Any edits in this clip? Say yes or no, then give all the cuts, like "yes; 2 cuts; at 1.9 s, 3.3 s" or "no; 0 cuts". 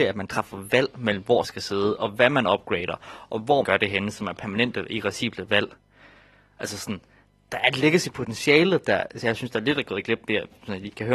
yes; 3 cuts; at 1.4 s, 3.6 s, 7.5 s